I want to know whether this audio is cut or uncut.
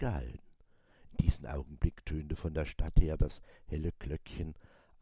uncut